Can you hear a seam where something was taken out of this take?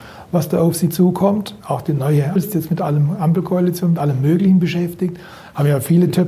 yes; 3 cuts; at 1.6 s, 2.4 s, 4.0 s

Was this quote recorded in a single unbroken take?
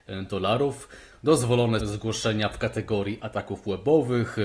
no; 1 cut; at 1.8 s

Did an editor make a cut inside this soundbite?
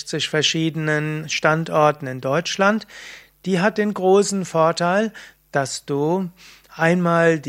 no; 0 cuts

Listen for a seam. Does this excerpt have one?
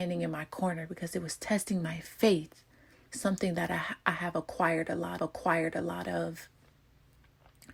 yes; 1 cut; at 5.2 s

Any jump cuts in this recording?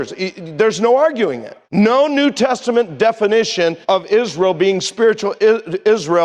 yes; 2 cuts; at 1.6 s, 3.8 s

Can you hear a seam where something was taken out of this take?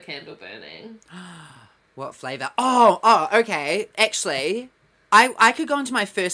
no; 0 cuts

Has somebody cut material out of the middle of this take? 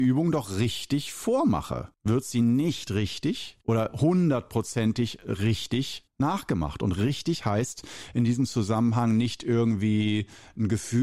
yes; 3 cuts; at 1.9 s, 3.6 s, 6.1 s

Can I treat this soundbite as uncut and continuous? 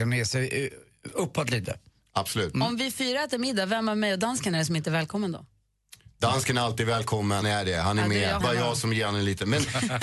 no; 2 cuts; at 7.4 s, 8.4 s

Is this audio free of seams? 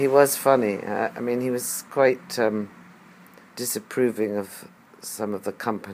yes; 0 cuts

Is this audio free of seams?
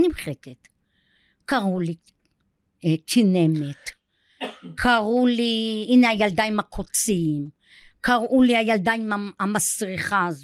yes; 0 cuts

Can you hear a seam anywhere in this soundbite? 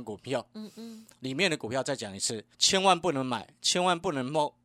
yes; 2 cuts; at 1.2 s, 2.5 s

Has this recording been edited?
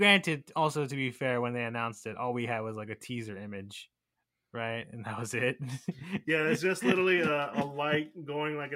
yes; 1 cut; at 4.1 s

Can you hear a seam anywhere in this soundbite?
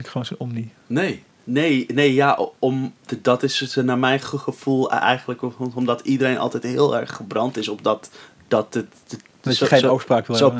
yes; 2 cuts; at 1.3 s, 9.0 s

